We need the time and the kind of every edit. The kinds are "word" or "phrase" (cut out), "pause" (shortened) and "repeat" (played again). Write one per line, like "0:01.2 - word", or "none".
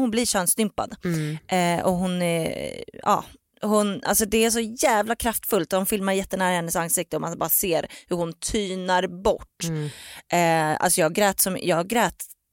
none